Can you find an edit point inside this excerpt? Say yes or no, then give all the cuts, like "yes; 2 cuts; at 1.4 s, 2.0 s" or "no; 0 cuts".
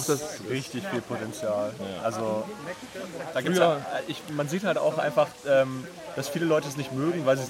no; 0 cuts